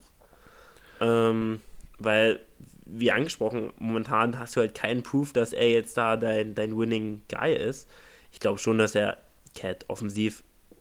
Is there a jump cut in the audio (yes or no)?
no